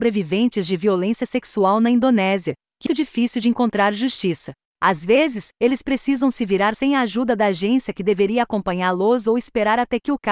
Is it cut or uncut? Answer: cut